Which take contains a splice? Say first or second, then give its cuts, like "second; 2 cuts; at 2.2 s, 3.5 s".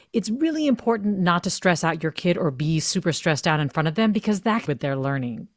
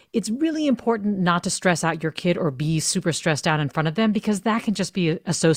first; 1 cut; at 4.7 s